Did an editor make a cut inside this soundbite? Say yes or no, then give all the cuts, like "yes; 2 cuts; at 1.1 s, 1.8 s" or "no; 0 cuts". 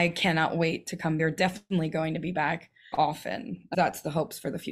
yes; 3 cuts; at 1.2 s, 2.9 s, 3.7 s